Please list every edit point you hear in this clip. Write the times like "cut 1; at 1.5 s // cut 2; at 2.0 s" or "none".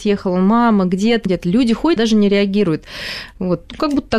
cut 1; at 1.3 s // cut 2; at 2.0 s